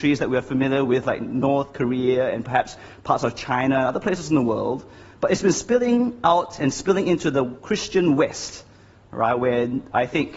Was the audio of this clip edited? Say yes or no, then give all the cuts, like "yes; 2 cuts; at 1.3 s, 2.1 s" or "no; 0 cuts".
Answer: no; 0 cuts